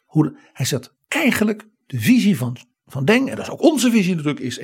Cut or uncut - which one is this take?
uncut